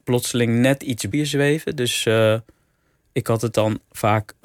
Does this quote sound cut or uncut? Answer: cut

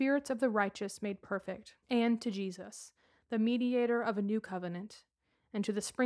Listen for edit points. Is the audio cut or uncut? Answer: cut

